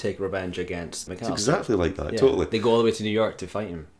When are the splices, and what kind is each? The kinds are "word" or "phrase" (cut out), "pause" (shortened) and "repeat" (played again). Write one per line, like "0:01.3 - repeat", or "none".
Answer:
0:01.1 - word
0:02.1 - word